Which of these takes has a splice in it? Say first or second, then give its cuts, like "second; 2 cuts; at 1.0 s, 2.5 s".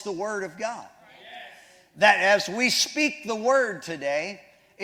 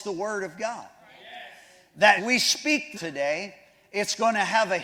second; 2 cuts; at 2.2 s, 2.9 s